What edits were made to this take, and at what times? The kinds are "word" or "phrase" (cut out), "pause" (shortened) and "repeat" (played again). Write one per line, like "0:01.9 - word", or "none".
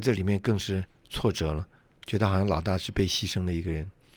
none